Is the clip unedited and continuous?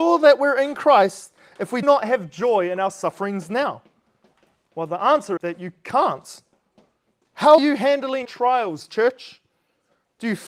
no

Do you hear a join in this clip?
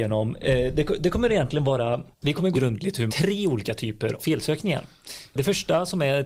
yes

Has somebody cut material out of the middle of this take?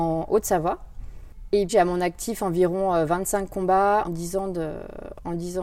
yes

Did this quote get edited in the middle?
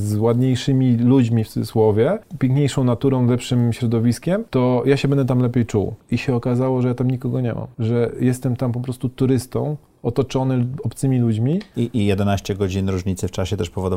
no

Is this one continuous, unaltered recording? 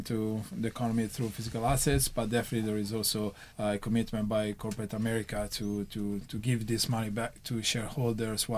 no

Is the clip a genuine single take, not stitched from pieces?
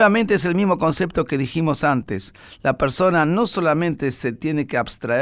yes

